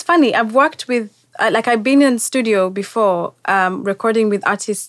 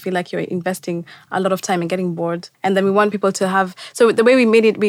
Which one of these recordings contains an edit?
second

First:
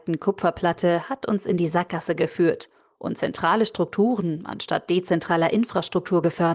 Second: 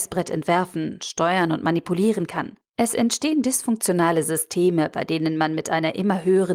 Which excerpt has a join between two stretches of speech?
second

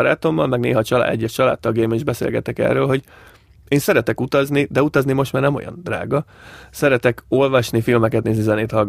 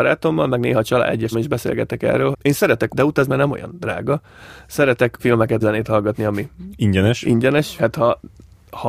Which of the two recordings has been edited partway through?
second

